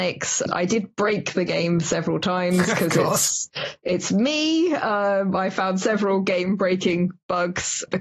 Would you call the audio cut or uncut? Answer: uncut